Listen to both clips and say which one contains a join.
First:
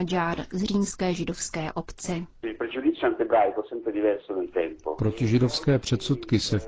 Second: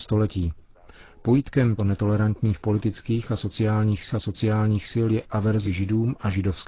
second; 3 cuts; at 1.8 s, 4.1 s, 5.6 s

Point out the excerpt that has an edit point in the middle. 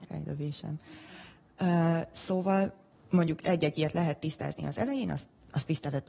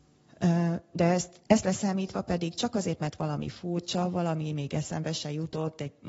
second; 1 cut; at 1.5 s

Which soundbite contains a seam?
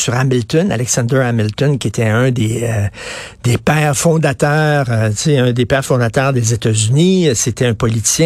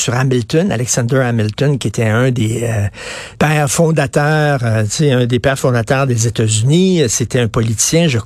second; 1 cut; at 3.3 s

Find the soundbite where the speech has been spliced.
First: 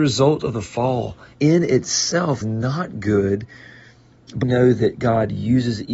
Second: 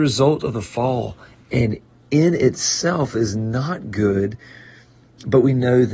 first; 3 cuts; at 1.3 s, 2.4 s, 4.4 s

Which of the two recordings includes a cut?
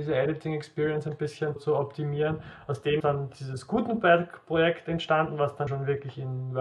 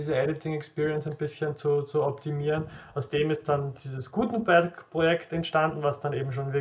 first; 3 cuts; at 1.6 s, 3.0 s, 5.7 s

